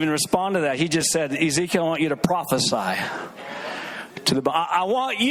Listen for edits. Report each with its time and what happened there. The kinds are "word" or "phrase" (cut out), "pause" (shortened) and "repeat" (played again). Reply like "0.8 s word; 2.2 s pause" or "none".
none